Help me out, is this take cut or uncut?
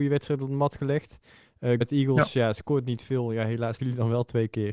cut